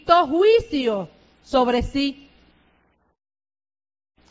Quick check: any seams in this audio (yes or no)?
no